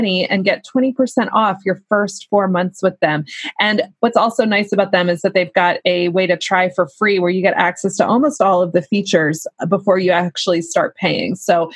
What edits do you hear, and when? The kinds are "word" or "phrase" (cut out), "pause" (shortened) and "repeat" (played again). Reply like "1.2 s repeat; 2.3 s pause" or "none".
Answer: none

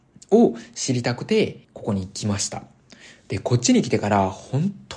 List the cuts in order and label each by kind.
1.6 s pause

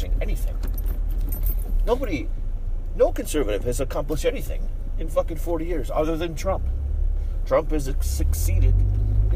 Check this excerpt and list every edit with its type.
none

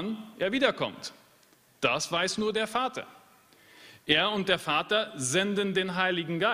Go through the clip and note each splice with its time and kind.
none

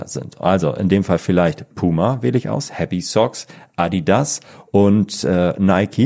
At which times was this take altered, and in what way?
none

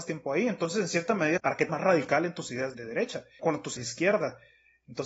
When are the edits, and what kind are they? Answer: 1.4 s phrase; 1.7 s word; 2.7 s word; 3.4 s word; 3.8 s word

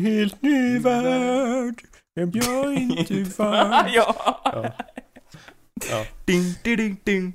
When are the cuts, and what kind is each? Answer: 2.3 s word; 3.3 s word

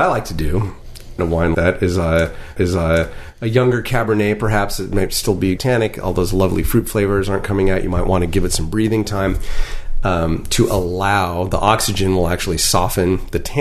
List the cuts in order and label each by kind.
1.2 s phrase; 1.5 s word; 2.6 s repeat; 5.6 s word

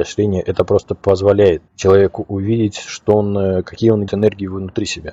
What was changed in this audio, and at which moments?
1.7 s pause; 4.1 s word

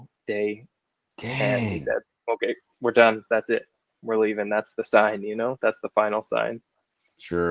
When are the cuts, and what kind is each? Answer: none

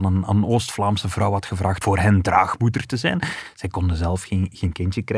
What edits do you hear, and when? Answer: 1.8 s word

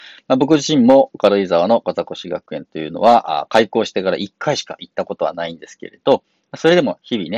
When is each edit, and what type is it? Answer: none

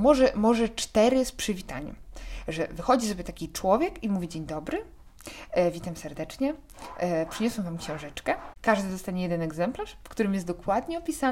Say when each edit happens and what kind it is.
none

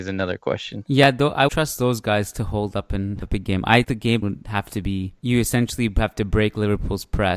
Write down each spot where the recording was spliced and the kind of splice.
1.5 s word; 3.2 s word; 3.8 s word; 4.2 s word; 5.2 s pause

